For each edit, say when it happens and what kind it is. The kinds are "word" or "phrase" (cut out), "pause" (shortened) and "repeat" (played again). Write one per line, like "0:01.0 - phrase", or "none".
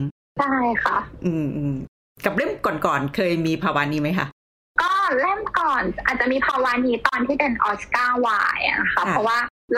none